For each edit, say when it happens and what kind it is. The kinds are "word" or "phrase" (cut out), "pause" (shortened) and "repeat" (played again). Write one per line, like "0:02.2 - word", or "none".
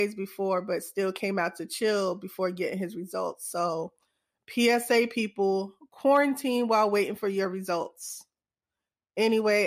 none